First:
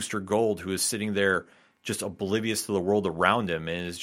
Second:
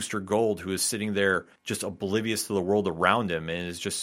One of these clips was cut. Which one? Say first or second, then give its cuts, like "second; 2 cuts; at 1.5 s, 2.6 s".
second; 1 cut; at 1.6 s